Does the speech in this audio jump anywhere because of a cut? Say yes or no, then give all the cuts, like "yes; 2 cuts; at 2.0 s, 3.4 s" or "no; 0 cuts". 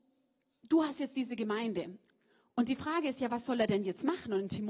no; 0 cuts